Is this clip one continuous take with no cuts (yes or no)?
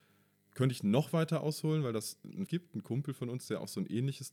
no